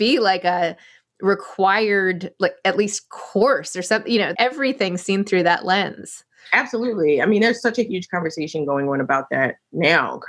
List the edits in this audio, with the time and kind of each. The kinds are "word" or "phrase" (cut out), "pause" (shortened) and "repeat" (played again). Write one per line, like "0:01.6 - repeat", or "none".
0:04.3 - word